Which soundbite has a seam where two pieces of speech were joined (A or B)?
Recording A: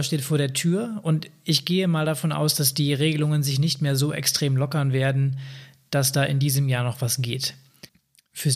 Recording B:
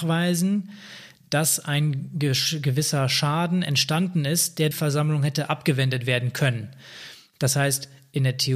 B